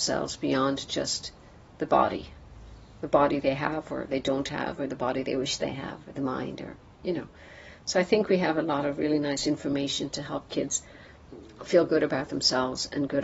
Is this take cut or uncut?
uncut